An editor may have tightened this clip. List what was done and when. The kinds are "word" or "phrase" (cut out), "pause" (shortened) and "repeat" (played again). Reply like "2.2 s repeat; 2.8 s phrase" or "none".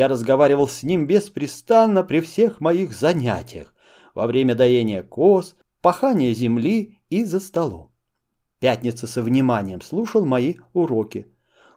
none